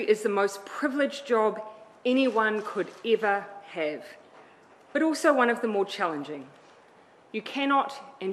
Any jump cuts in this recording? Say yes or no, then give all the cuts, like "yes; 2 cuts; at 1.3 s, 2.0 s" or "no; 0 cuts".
no; 0 cuts